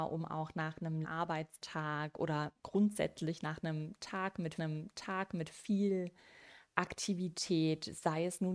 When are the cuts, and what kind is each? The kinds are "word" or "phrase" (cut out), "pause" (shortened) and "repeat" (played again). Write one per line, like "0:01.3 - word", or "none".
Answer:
0:01.0 - word
0:02.6 - pause
0:04.6 - repeat